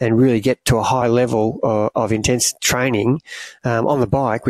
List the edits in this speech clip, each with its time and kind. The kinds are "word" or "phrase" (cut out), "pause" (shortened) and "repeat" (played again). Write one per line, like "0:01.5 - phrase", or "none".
none